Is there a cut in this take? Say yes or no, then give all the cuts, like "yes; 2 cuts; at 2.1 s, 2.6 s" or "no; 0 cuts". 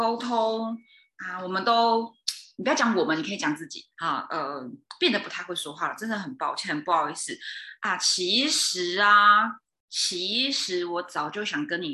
no; 0 cuts